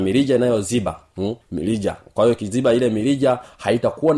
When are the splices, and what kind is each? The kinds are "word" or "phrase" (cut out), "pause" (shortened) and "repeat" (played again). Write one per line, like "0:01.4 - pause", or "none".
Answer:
0:01.4 - pause